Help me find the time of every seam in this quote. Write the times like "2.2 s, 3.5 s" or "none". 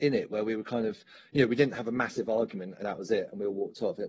2.8 s